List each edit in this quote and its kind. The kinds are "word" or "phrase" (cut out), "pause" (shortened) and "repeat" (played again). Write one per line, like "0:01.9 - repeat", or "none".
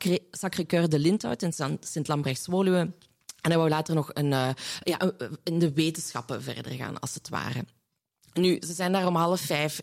none